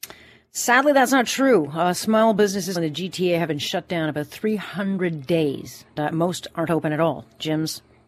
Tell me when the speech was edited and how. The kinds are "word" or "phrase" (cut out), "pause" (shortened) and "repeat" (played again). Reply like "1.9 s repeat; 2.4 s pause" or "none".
2.8 s phrase; 3.5 s word; 6.0 s word